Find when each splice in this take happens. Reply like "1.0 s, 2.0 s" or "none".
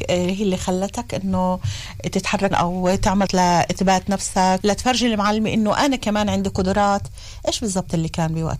2.5 s, 3.3 s, 4.6 s